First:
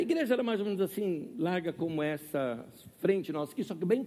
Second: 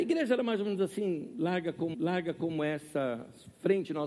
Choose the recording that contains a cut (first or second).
second